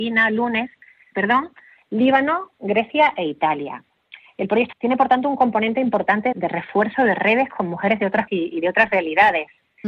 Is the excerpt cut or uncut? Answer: cut